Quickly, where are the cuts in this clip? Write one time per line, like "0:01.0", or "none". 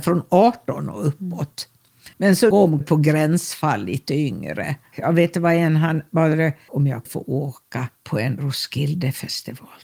0:02.1
0:02.5
0:02.8
0:04.9
0:06.7
0:07.1
0:08.0